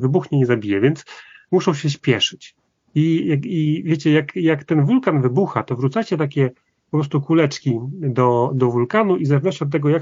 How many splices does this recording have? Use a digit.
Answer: 0